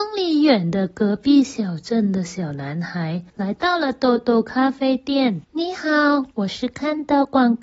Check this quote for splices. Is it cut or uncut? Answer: cut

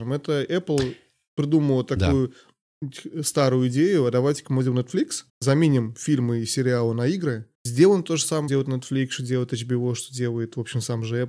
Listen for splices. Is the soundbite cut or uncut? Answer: cut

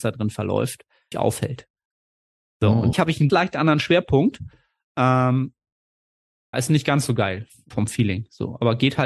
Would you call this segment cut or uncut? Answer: cut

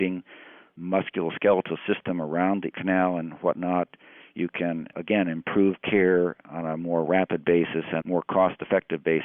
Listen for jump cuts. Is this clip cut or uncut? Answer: cut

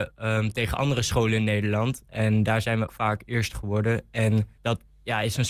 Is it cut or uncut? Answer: cut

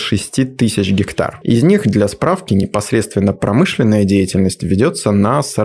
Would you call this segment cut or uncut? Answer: uncut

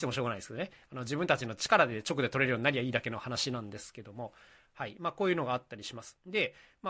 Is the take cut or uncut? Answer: uncut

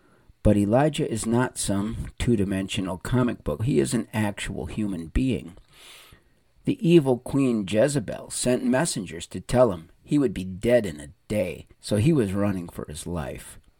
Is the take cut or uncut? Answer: cut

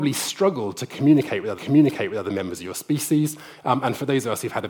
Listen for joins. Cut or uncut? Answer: cut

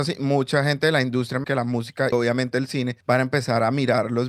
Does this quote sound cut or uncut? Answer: cut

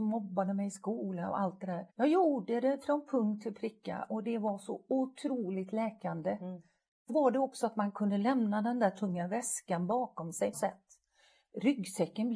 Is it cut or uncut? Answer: cut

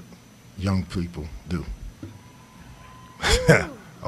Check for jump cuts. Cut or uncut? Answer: uncut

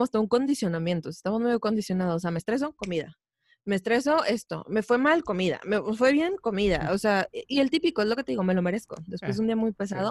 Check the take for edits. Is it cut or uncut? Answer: uncut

